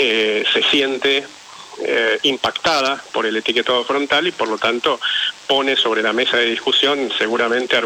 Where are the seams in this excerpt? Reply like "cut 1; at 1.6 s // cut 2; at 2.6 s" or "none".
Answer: none

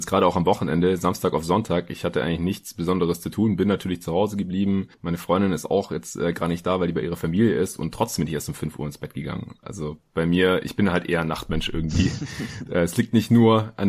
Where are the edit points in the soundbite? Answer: none

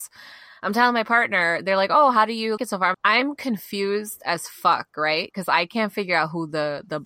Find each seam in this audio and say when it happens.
cut 1; at 2.6 s // cut 2; at 2.9 s

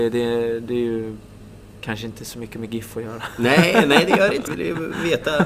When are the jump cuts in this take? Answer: cut 1; at 4.5 s

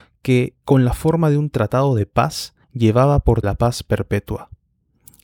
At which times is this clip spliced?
cut 1; at 2.6 s // cut 2; at 3.4 s

